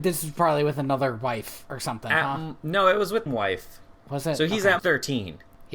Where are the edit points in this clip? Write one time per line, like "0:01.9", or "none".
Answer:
0:03.3
0:04.8